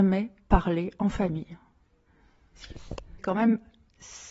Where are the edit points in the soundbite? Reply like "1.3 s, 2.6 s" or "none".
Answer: 3.2 s